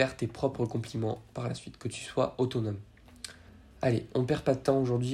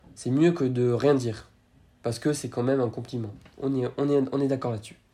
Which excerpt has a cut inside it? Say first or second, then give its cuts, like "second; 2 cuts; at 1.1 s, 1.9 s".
first; 1 cut; at 3.5 s